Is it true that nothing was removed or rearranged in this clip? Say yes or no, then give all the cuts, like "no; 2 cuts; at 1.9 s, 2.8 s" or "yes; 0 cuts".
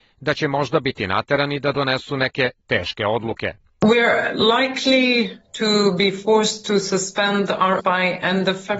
no; 2 cuts; at 3.7 s, 7.8 s